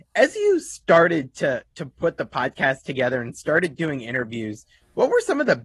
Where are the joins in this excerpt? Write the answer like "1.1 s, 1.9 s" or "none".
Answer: none